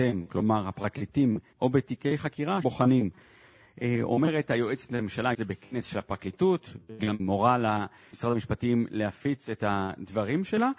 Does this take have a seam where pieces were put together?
yes; 6 cuts; at 1.5 s, 2.6 s, 4.9 s, 5.3 s, 7.2 s, 8.1 s

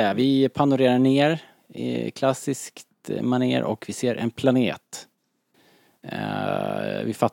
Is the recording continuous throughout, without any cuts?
yes; 0 cuts

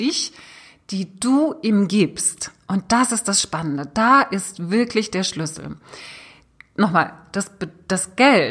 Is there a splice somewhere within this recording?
no; 0 cuts

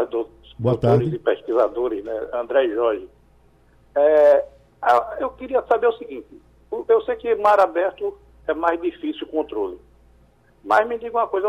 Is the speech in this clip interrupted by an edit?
no; 0 cuts

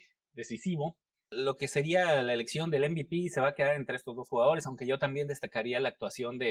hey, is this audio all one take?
yes; 0 cuts

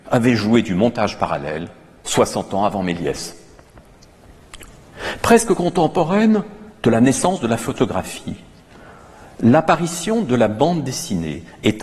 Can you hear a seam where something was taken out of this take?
no; 0 cuts

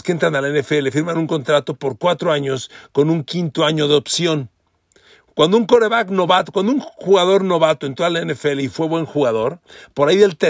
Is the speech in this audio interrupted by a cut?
no; 0 cuts

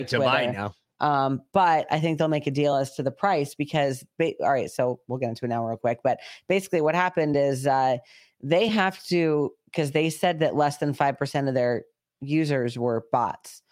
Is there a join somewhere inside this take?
no; 0 cuts

